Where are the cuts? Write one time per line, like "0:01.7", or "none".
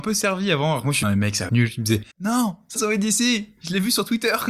0:01.0
0:01.5
0:02.1
0:02.8